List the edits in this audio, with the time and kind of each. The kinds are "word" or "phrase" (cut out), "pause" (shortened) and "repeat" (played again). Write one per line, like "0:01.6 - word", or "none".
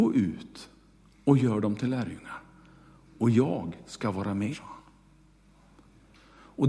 0:04.5 - word